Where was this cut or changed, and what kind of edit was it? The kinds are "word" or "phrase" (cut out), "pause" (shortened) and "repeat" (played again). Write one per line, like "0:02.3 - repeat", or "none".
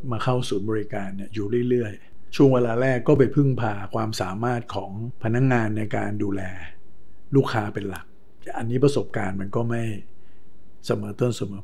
0:02.3 - word